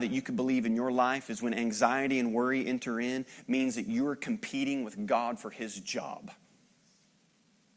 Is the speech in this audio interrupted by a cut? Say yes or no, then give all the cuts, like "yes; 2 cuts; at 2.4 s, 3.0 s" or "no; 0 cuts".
no; 0 cuts